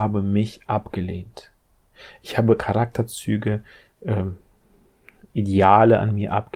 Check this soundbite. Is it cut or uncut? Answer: uncut